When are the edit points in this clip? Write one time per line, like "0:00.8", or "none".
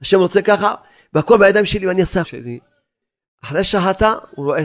0:02.2